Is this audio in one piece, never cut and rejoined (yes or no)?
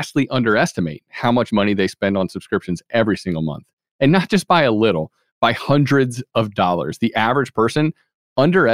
yes